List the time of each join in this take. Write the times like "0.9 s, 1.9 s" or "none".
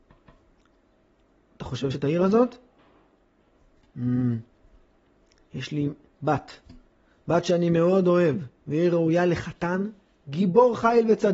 1.9 s, 8.6 s